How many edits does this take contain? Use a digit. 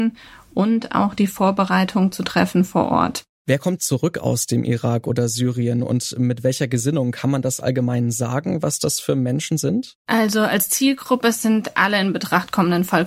1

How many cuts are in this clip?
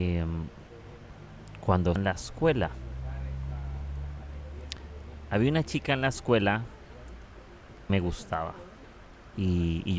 2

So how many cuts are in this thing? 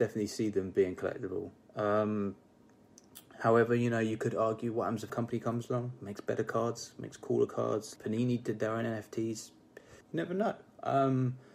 3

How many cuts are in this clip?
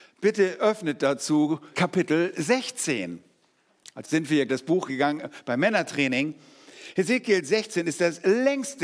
4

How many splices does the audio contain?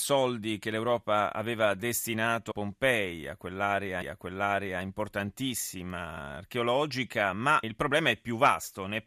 3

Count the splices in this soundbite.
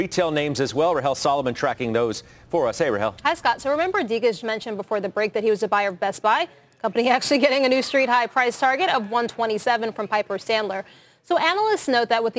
1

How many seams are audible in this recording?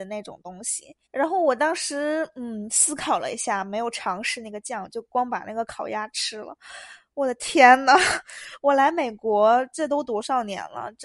1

